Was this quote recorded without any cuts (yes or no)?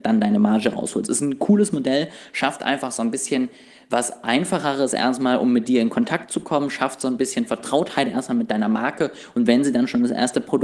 yes